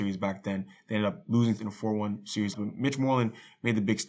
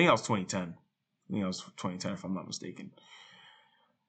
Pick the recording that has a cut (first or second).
first